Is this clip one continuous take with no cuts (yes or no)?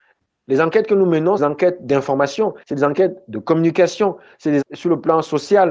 no